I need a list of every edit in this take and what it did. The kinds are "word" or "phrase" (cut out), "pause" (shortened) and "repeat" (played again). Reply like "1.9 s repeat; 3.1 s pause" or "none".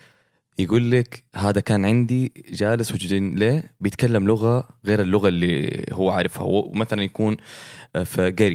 1.3 s pause; 2.9 s phrase